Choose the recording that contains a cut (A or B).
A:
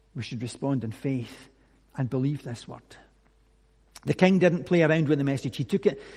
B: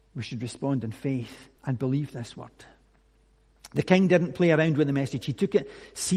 B